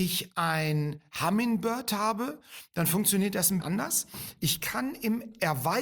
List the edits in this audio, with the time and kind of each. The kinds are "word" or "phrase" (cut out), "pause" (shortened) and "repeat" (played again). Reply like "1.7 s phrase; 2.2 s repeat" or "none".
3.6 s word